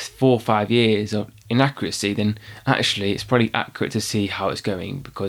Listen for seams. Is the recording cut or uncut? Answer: uncut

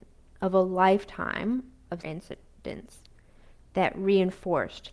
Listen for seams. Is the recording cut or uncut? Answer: cut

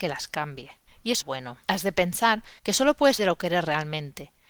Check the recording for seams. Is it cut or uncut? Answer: cut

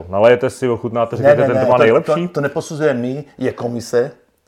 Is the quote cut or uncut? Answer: uncut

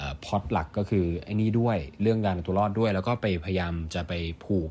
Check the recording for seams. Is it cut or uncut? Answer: uncut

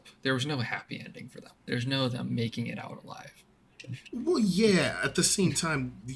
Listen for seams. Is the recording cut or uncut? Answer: cut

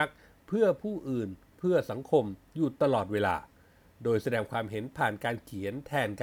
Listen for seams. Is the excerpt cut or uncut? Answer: uncut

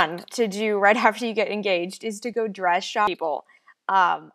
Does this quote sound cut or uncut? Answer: uncut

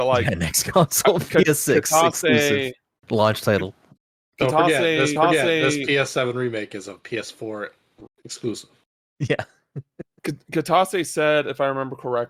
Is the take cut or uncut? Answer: cut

